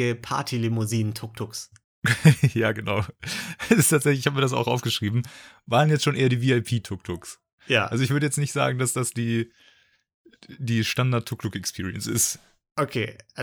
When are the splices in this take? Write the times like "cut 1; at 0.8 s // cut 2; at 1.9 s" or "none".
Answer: none